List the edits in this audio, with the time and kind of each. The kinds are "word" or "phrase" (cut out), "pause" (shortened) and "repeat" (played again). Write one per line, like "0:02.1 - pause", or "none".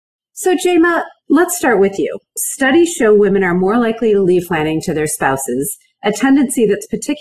0:01.2 - pause
0:04.5 - word